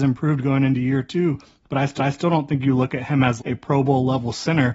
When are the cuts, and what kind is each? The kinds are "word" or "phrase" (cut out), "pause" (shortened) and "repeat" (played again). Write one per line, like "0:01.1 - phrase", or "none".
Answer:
0:02.0 - repeat
0:03.4 - word